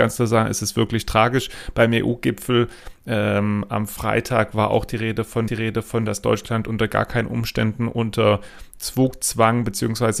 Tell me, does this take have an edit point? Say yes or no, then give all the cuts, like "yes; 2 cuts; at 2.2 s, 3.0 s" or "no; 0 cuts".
yes; 1 cut; at 5.5 s